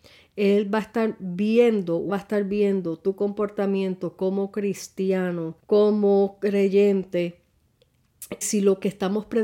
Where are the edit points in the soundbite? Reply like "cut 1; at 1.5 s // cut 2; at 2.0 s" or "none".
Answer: cut 1; at 2.1 s // cut 2; at 5.6 s // cut 3; at 8.4 s